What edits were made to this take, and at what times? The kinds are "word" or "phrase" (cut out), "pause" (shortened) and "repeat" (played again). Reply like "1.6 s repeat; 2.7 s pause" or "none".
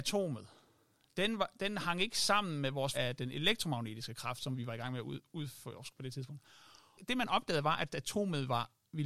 2.9 s word